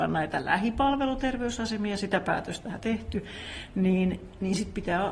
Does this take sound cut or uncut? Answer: cut